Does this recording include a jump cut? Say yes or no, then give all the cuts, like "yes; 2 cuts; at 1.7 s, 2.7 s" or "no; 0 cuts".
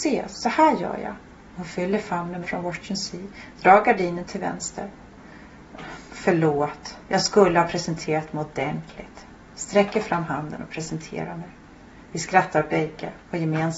yes; 1 cut; at 2.4 s